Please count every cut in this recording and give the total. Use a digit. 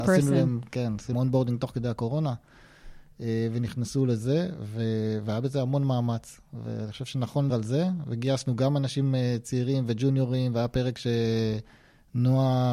2